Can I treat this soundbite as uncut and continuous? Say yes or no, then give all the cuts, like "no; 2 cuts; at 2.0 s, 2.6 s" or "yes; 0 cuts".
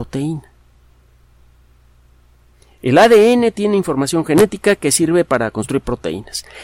yes; 0 cuts